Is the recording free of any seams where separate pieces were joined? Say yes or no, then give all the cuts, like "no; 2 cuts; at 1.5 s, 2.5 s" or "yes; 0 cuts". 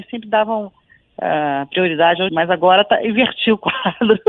no; 1 cut; at 2.3 s